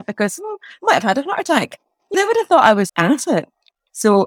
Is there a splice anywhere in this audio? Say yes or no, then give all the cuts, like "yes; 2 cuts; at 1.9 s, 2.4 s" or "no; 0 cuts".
yes; 2 cuts; at 2.1 s, 2.9 s